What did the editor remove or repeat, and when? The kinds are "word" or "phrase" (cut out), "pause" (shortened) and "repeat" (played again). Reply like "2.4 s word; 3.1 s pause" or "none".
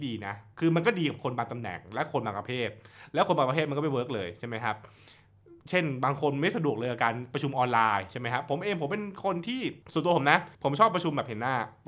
5.6 s pause; 9.8 s pause; 10.5 s pause